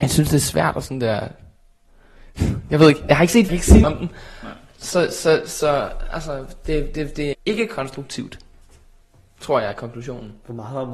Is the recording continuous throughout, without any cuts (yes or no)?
no